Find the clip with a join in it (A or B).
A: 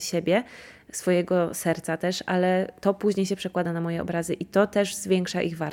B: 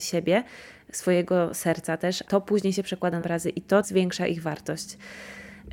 B